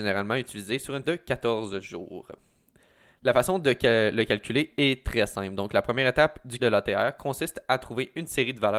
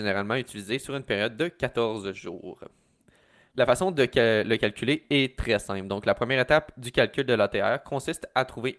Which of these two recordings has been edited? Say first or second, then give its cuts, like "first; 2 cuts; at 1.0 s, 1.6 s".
first; 2 cuts; at 1.0 s, 6.6 s